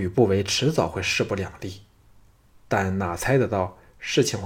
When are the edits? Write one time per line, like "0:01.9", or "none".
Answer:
none